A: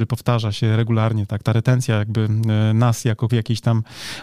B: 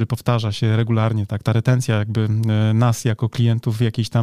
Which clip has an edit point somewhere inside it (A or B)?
A